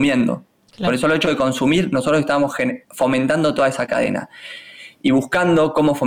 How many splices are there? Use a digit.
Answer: 1